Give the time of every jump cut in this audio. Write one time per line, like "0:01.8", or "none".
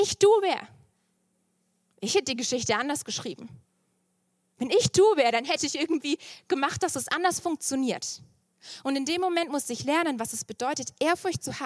none